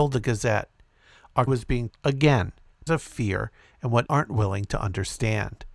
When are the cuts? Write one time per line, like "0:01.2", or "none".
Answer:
0:01.5
0:01.9
0:02.9
0:04.1